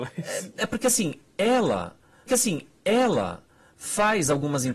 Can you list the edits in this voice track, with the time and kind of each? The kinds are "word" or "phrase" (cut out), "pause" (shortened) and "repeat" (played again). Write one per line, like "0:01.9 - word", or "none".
0:02.3 - repeat